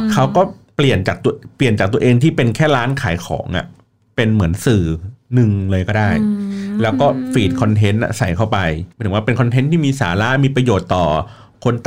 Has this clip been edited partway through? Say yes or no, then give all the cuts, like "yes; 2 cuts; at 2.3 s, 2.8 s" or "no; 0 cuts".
yes; 2 cuts; at 1.5 s, 8.9 s